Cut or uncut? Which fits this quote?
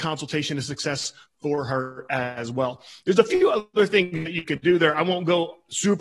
uncut